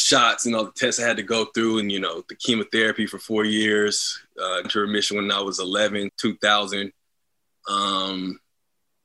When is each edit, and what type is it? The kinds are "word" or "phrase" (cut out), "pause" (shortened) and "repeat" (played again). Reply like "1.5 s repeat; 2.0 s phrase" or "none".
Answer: 1.8 s word; 4.6 s word; 6.1 s word